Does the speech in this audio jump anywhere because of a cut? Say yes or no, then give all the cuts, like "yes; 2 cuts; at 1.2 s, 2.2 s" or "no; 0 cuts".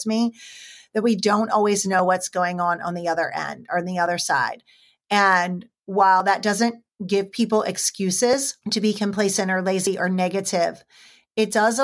yes; 1 cut; at 8.6 s